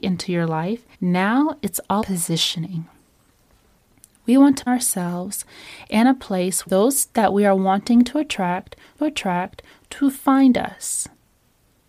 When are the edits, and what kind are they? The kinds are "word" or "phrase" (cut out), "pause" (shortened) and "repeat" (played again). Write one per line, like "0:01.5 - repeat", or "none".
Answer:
0:00.9 - pause
0:02.0 - word
0:04.7 - word
0:06.7 - phrase
0:09.0 - repeat